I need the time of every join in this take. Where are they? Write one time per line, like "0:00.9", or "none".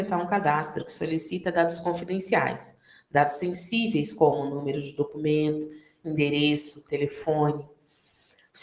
none